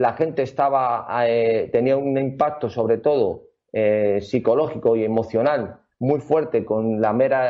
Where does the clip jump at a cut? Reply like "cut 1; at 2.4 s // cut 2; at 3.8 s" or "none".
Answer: none